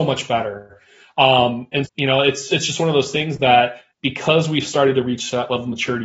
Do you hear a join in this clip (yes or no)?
yes